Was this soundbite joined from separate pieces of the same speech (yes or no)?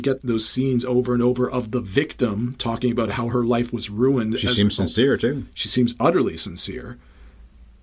no